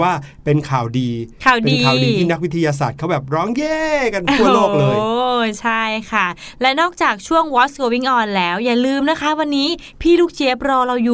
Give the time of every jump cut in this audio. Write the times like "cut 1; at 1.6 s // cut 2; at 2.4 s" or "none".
none